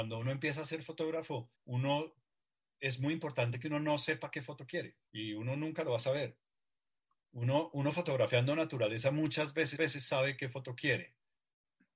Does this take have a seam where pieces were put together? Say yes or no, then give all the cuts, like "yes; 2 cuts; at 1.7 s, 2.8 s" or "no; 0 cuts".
yes; 3 cuts; at 1.5 s, 5.1 s, 9.8 s